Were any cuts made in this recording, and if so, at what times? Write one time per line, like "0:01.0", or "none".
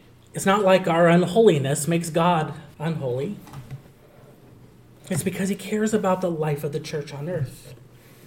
0:02.7